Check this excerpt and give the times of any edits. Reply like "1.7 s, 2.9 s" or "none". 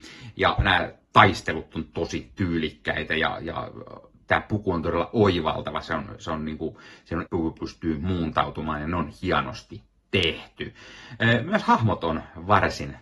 7.3 s